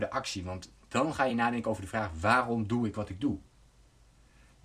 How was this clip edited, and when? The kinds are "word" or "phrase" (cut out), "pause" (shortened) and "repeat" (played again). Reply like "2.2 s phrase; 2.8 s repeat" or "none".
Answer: none